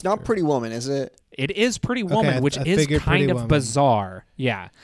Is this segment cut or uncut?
cut